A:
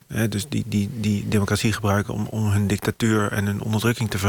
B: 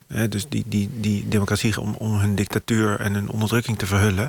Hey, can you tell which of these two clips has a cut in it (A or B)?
B